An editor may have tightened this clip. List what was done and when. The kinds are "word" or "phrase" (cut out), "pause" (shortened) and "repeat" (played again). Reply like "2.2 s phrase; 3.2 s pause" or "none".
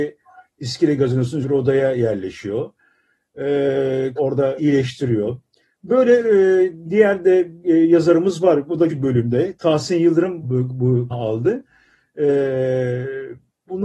1.4 s word; 4.2 s word; 4.6 s word; 6.9 s word; 7.6 s word; 8.9 s word; 10.4 s word; 11.1 s word